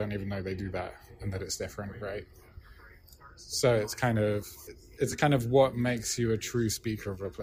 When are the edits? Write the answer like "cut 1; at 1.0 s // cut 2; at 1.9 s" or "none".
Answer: cut 1; at 5.0 s